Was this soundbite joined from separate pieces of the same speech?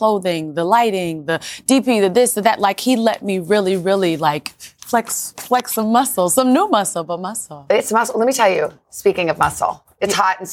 no; 0 cuts

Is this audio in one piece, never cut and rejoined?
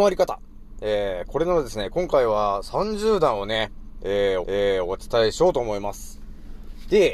no; 1 cut; at 4.4 s

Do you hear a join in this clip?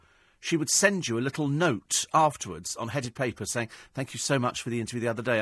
no; 0 cuts

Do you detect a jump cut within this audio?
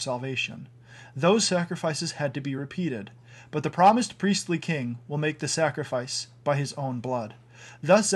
no; 0 cuts

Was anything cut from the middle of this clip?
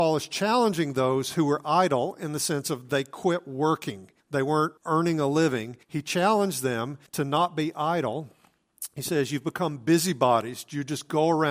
yes; 4 cuts; at 4.2 s, 4.8 s, 5.8 s, 7.1 s

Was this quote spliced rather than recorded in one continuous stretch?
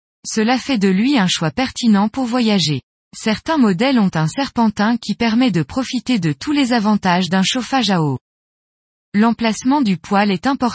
no; 0 cuts

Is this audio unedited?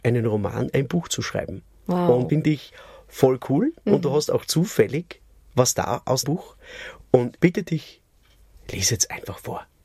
no; 3 cuts; at 2.3 s, 6.2 s, 7.4 s

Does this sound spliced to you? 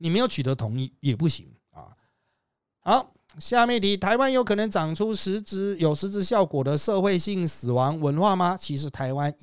no; 0 cuts

